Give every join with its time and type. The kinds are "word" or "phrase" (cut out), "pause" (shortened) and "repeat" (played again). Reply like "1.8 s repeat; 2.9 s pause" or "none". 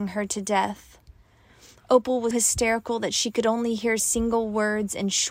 2.3 s word